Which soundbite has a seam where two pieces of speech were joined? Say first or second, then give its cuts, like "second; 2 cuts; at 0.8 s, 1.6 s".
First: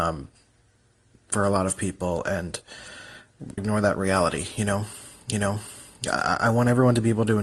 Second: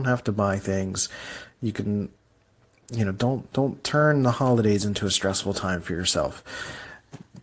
first; 2 cuts; at 3.6 s, 5.3 s